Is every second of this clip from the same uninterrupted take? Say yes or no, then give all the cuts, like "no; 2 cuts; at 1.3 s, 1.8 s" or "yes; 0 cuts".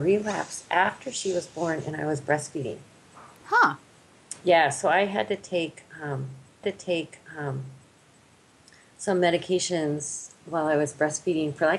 no; 1 cut; at 6.6 s